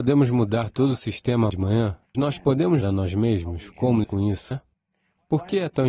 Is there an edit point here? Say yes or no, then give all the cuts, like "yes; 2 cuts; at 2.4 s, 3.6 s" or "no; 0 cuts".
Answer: yes; 5 cuts; at 1.5 s, 2.1 s, 2.8 s, 4.0 s, 4.5 s